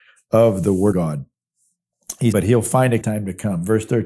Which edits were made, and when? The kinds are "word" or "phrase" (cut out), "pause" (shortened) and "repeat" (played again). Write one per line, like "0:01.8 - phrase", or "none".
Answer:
0:00.9 - word
0:02.3 - word
0:03.0 - word